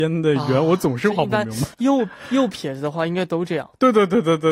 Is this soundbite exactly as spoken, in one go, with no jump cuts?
no; 1 cut; at 1.7 s

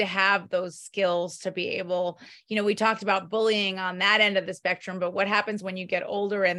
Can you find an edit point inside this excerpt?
no; 0 cuts

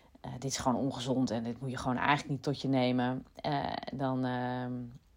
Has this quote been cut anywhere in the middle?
no; 0 cuts

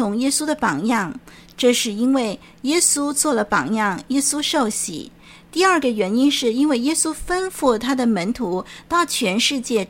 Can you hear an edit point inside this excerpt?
no; 0 cuts

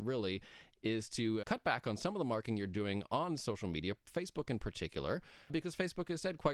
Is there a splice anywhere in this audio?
yes; 2 cuts; at 1.4 s, 5.5 s

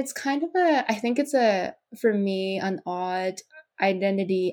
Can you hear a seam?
no; 0 cuts

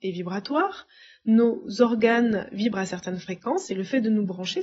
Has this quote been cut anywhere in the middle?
no; 0 cuts

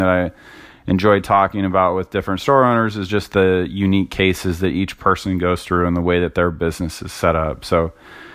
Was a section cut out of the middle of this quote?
no; 0 cuts

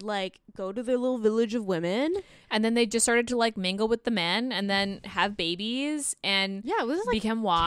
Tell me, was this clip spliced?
no; 0 cuts

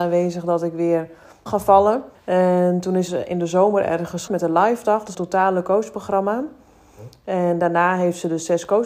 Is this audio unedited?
no; 5 cuts; at 1.5 s, 2.1 s, 3.1 s, 4.3 s, 5.1 s

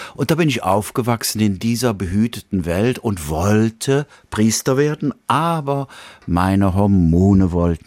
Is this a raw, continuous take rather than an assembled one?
yes; 0 cuts

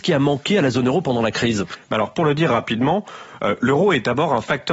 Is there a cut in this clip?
no; 0 cuts

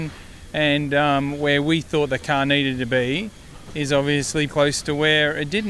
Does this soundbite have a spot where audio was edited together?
yes; 1 cut; at 4.5 s

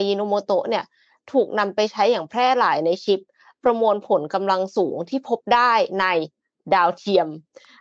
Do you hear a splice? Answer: no; 0 cuts

